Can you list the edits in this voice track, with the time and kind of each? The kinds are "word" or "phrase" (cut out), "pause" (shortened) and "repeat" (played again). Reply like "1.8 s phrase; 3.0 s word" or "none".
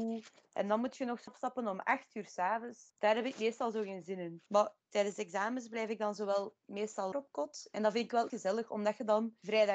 1.3 s phrase; 4.5 s pause; 7.1 s word; 8.3 s word